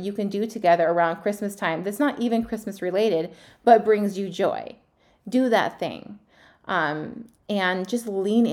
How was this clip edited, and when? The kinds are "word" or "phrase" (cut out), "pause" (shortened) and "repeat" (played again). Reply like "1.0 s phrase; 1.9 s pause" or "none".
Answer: none

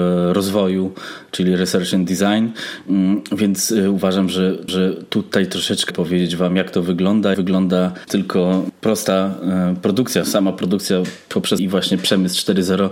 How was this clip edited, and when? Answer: 4.7 s repeat; 5.9 s word; 7.3 s word; 8.1 s phrase; 10.2 s word; 11.6 s word

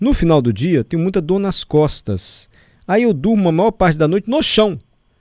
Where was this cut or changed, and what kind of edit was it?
none

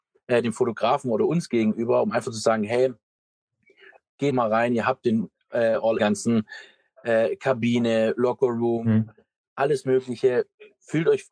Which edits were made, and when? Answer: 4.3 s word; 6.0 s phrase

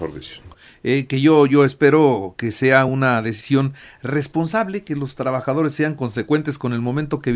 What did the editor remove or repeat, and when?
none

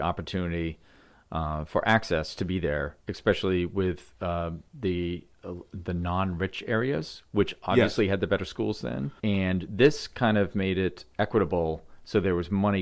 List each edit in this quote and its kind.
3.0 s pause; 4.7 s pause; 9.2 s pause

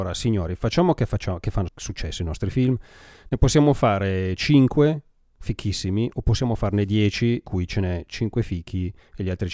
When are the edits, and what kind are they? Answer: 1.7 s word; 7.4 s word

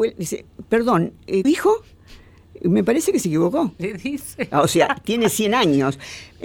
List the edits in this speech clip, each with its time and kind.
1.4 s word

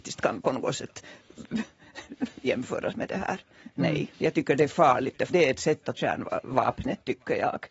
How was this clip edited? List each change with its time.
4.1 s pause; 5.3 s word; 6.0 s word

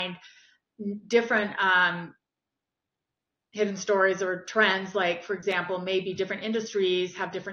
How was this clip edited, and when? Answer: none

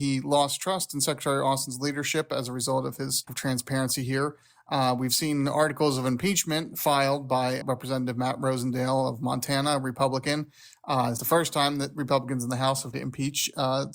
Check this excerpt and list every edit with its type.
3.3 s phrase; 7.6 s word; 11.2 s word; 12.9 s word

